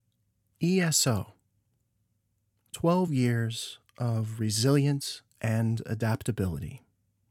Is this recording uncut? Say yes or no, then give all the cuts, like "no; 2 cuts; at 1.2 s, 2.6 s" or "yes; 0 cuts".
yes; 0 cuts